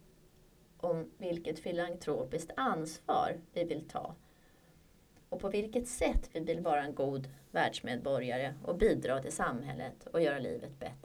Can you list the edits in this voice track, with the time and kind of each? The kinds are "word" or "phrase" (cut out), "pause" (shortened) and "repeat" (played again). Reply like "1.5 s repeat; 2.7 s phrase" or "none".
none